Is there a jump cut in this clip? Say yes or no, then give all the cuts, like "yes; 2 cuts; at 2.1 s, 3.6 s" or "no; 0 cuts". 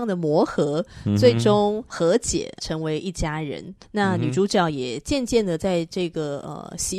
yes; 1 cut; at 3.8 s